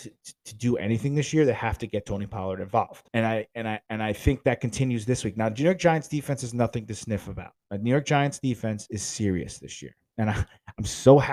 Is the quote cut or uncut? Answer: cut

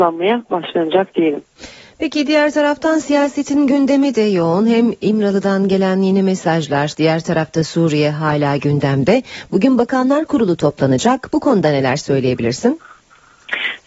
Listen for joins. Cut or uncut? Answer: uncut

